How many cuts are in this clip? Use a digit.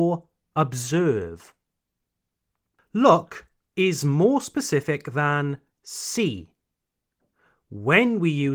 0